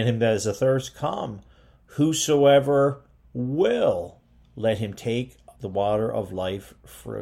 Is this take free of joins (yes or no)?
no